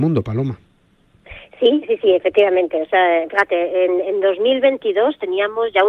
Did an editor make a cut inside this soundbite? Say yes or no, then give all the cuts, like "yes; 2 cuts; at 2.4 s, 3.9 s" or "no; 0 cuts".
no; 0 cuts